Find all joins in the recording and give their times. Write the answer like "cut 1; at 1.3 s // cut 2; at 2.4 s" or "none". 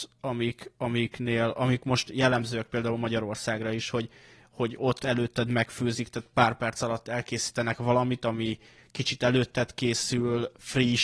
none